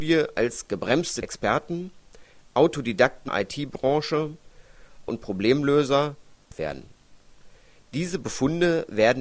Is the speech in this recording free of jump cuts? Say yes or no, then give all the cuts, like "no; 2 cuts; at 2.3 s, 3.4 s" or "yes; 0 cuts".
no; 4 cuts; at 1.2 s, 3.3 s, 5.1 s, 6.5 s